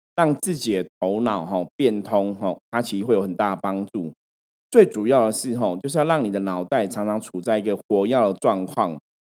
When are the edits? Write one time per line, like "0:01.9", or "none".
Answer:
none